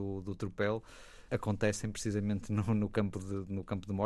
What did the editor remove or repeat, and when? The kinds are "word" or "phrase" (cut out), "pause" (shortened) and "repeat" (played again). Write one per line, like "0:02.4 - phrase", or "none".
0:01.3 - word